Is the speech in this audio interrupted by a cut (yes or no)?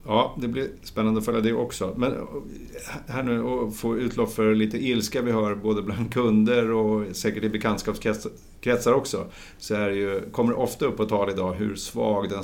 no